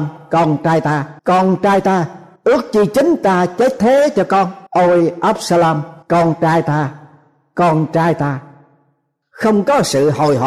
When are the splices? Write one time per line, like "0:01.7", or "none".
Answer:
0:01.2
0:02.4
0:04.7
0:06.0